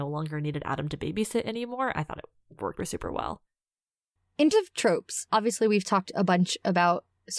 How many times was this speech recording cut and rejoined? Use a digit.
3